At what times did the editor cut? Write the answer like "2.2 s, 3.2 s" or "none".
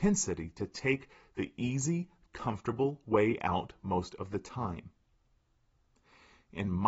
none